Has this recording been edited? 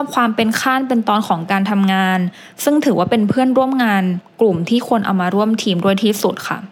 no; 0 cuts

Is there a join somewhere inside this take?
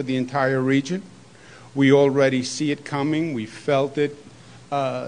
no; 0 cuts

